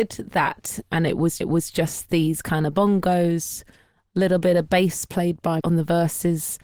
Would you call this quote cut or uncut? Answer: cut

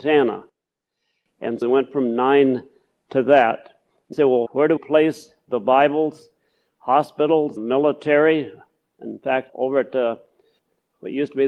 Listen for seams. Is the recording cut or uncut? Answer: cut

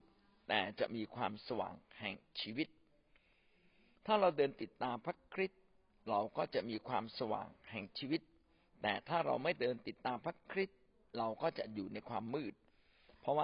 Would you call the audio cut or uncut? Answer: uncut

